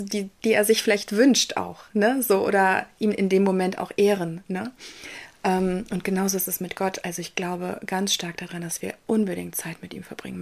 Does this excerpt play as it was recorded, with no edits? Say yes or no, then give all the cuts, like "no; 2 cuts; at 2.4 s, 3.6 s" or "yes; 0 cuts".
yes; 0 cuts